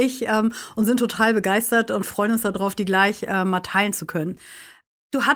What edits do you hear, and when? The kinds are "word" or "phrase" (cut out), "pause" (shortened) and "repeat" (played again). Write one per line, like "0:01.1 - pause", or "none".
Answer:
none